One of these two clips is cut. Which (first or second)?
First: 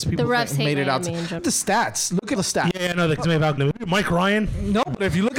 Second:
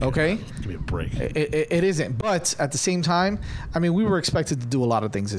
first